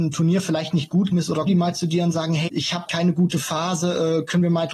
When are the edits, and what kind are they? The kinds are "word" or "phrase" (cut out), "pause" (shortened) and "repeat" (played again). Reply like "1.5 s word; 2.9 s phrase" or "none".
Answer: 1.1 s word; 1.5 s word; 2.5 s word; 2.9 s word